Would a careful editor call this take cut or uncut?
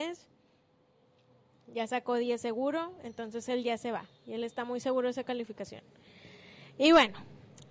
uncut